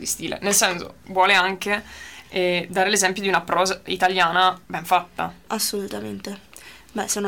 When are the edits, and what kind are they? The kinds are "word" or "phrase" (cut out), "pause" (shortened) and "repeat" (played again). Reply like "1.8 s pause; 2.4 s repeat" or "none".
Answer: 1.0 s pause; 4.6 s pause